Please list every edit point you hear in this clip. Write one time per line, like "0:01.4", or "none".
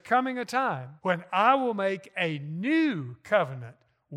0:01.0